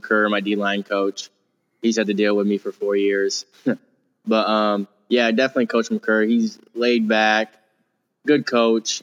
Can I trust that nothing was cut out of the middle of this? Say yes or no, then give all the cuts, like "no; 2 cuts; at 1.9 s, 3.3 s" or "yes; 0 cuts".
yes; 0 cuts